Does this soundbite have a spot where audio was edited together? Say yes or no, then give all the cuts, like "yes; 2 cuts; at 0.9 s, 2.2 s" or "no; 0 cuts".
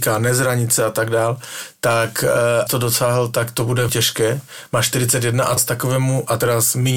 yes; 3 cuts; at 2.7 s, 3.9 s, 5.6 s